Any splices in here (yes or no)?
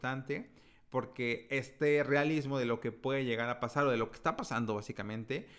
no